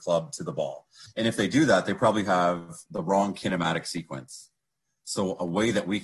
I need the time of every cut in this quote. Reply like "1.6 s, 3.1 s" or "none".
none